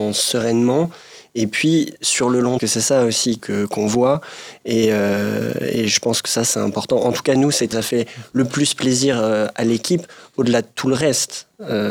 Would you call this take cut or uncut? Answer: cut